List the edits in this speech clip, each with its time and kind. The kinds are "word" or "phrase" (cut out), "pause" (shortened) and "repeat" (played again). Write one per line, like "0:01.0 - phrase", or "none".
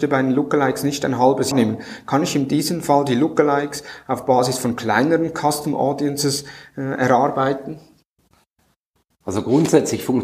0:01.5 - word